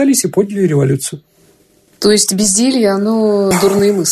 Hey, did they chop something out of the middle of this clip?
no; 0 cuts

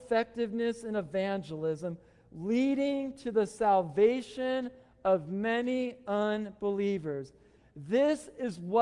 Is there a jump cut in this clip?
no; 0 cuts

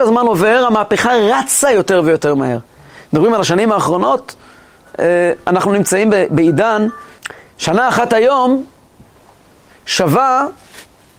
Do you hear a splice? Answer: no; 0 cuts

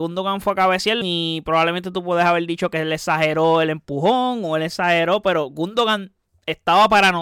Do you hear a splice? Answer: yes; 1 cut; at 1.0 s

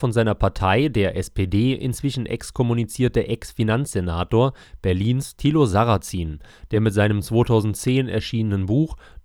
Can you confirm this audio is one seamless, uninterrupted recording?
yes; 0 cuts

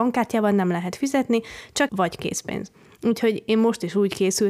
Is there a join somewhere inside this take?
yes; 1 cut; at 1.9 s

